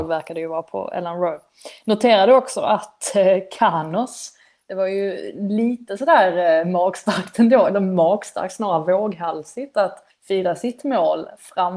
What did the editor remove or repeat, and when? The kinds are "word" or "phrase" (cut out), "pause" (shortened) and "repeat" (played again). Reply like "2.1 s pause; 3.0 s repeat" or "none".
10.1 s pause